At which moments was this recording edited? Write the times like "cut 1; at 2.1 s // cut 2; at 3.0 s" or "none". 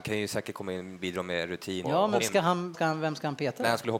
cut 1; at 1.8 s // cut 2; at 2.2 s // cut 3; at 2.7 s